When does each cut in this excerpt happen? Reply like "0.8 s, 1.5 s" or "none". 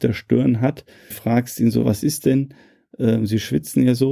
1.1 s, 1.8 s